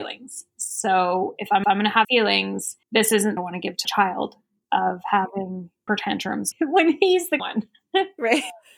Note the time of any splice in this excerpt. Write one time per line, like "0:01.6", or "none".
0:01.6
0:02.0
0:02.8
0:03.4
0:03.8
0:05.9
0:06.5
0:07.4